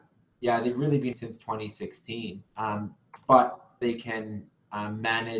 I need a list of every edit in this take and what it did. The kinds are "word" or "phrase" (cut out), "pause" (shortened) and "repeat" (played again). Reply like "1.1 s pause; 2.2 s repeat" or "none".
1.1 s word; 2.5 s pause; 3.8 s word